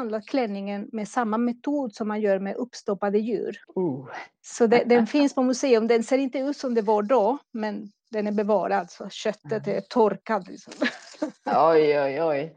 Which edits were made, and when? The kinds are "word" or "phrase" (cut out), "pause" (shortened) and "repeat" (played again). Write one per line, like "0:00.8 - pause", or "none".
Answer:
0:03.6 - pause